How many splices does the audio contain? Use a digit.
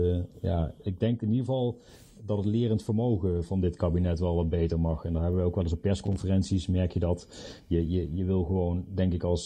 0